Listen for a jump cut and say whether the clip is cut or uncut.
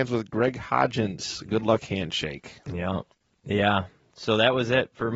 uncut